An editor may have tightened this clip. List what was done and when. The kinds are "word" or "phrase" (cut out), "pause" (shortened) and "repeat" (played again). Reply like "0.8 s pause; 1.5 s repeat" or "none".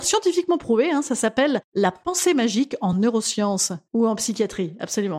none